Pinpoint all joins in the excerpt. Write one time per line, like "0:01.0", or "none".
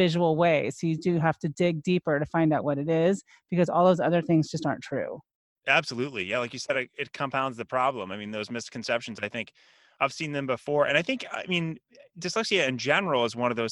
none